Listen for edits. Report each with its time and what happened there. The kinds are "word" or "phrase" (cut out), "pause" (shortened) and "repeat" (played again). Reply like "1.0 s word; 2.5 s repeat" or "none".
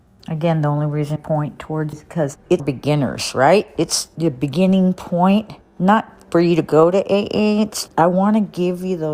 1.2 s word; 1.9 s word; 2.6 s word; 5.6 s pause; 7.9 s word